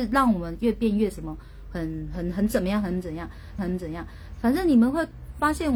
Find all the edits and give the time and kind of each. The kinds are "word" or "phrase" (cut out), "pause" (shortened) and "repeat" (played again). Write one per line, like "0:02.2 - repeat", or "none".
0:03.6 - repeat